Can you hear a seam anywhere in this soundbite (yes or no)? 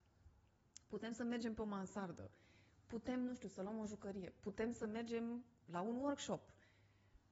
no